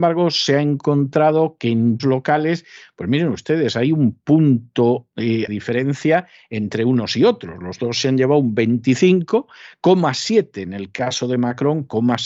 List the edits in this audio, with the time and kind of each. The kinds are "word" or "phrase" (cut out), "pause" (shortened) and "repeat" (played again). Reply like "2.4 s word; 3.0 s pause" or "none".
2.0 s word; 5.5 s phrase